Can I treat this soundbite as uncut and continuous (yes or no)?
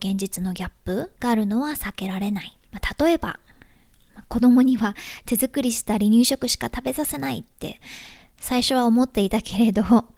no